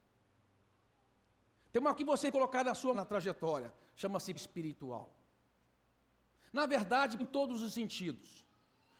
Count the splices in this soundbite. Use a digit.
5